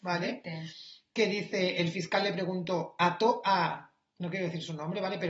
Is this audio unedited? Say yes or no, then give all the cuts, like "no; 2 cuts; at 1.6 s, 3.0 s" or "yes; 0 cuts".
yes; 0 cuts